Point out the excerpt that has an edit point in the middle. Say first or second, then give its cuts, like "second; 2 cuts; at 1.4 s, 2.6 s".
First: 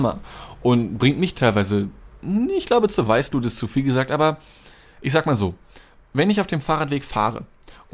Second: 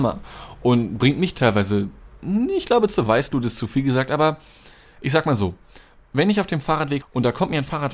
second; 1 cut; at 7.0 s